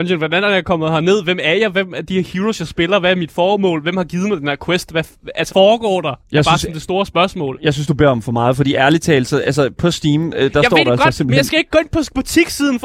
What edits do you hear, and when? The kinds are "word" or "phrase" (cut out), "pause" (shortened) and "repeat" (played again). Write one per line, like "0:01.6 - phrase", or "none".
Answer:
0:05.5 - word